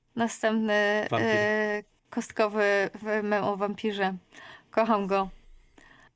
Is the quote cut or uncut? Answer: uncut